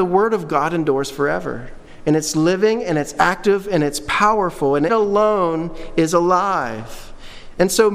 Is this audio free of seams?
no; 1 cut; at 4.9 s

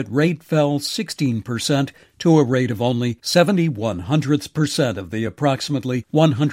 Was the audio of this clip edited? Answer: no; 0 cuts

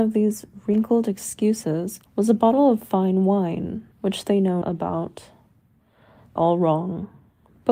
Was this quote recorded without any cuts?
no; 4 cuts; at 2.1 s, 3.9 s, 4.6 s, 6.4 s

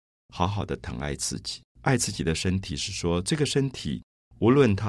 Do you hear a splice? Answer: yes; 1 cut; at 1.7 s

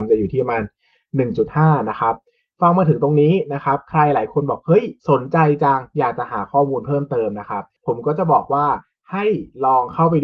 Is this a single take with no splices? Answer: no; 1 cut; at 5.0 s

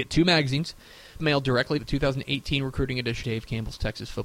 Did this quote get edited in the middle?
yes; 3 cuts; at 1.2 s, 1.8 s, 3.2 s

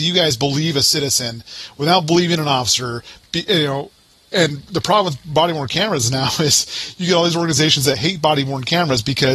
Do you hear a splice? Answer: no; 0 cuts

